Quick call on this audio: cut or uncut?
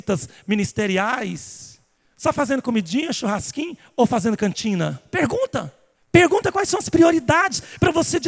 uncut